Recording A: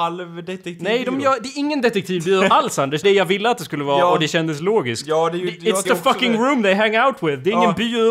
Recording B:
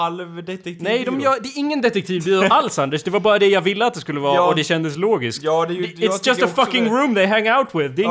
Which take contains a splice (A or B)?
A